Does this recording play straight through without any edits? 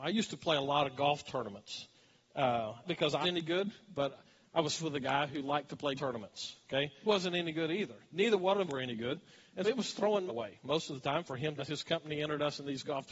no; 9 cuts; at 2.8 s, 3.2 s, 4.8 s, 6.0 s, 7.1 s, 8.7 s, 9.6 s, 10.3 s, 11.6 s

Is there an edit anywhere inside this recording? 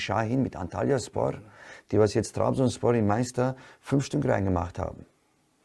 no; 0 cuts

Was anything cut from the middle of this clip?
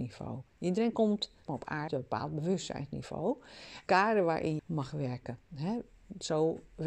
yes; 4 cuts; at 1.5 s, 1.9 s, 3.9 s, 4.6 s

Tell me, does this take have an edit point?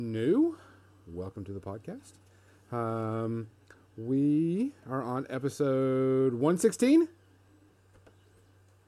no; 0 cuts

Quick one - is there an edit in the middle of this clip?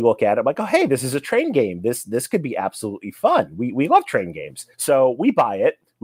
yes; 1 cut; at 4.7 s

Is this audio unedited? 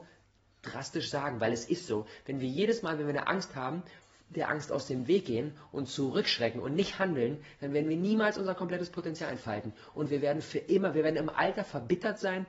yes; 0 cuts

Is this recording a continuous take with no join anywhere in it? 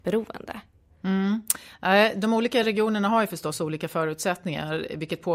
yes; 0 cuts

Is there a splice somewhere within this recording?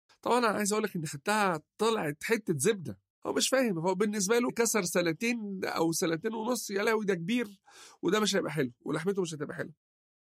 yes; 3 cuts; at 1.7 s, 3.1 s, 4.5 s

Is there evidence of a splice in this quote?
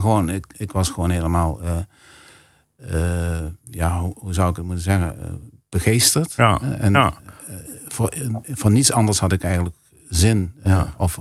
yes; 1 cut; at 3.6 s

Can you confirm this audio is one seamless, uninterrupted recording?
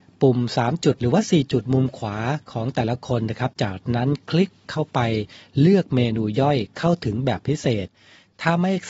yes; 0 cuts

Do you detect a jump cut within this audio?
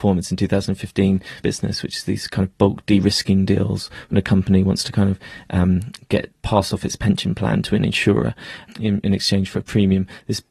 yes; 2 cuts; at 1.4 s, 6.3 s

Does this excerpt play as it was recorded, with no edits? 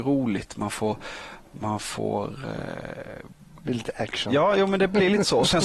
yes; 0 cuts

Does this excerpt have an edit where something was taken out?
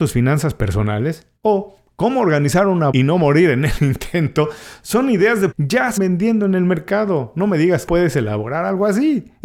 yes; 5 cuts; at 1.4 s, 2.9 s, 5.5 s, 6.0 s, 7.9 s

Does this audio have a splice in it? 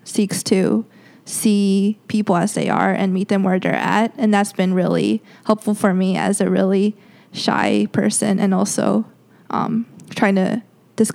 no; 0 cuts

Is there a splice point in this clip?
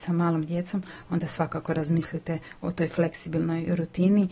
no; 0 cuts

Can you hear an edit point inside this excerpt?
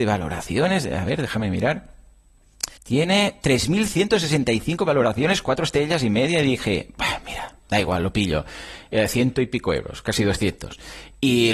yes; 1 cut; at 2.8 s

